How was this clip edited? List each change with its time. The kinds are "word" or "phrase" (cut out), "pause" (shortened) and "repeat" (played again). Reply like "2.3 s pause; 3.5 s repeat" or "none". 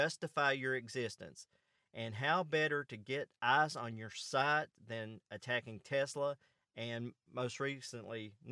none